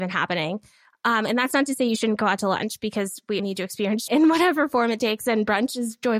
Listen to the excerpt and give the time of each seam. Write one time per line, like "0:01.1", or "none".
0:03.4
0:04.1